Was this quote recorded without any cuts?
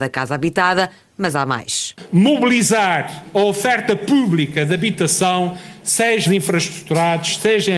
no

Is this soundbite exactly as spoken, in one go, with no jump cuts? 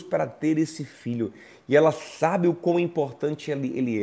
yes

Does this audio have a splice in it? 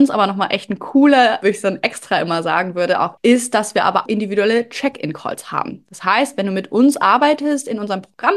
yes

